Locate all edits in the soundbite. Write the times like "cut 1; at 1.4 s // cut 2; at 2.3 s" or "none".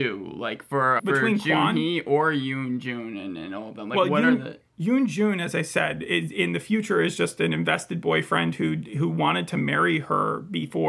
cut 1; at 1.0 s

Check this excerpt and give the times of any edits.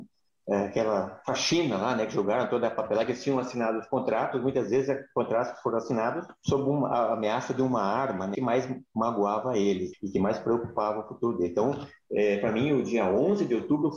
cut 1; at 6.4 s // cut 2; at 8.3 s // cut 3; at 9.9 s

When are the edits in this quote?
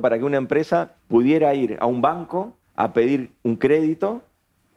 cut 1; at 1.0 s // cut 2; at 2.6 s

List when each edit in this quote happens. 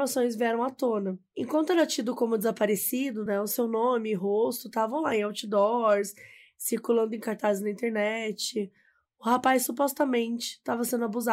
none

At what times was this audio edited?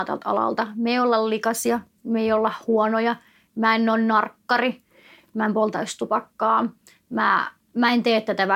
none

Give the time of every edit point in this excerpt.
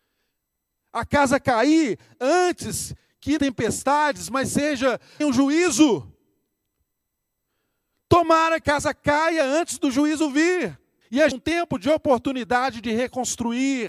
cut 1; at 3.4 s // cut 2; at 5.2 s // cut 3; at 8.6 s // cut 4; at 11.0 s // cut 5; at 11.3 s

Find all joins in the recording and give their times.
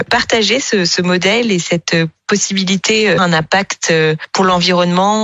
cut 1; at 3.2 s

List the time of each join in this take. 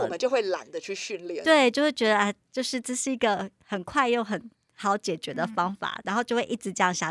cut 1; at 6.0 s

